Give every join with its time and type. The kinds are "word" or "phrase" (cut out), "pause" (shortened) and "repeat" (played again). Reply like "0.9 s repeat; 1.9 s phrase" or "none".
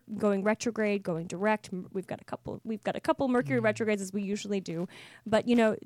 none